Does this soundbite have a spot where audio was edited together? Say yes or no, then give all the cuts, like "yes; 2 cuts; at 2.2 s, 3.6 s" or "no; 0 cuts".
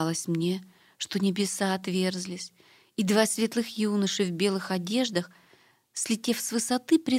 no; 0 cuts